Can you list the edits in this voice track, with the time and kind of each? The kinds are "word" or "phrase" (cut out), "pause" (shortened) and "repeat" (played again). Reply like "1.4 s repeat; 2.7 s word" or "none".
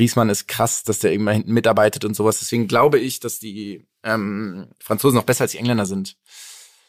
none